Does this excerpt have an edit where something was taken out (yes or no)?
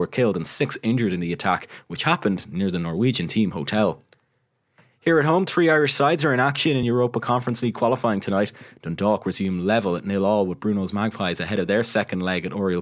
no